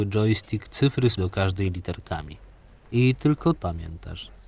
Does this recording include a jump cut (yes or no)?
yes